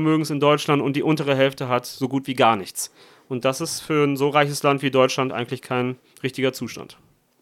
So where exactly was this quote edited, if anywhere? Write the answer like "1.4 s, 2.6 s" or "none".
none